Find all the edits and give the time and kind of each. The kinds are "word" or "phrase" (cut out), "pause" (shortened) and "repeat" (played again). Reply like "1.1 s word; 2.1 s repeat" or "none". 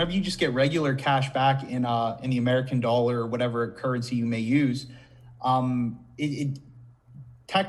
none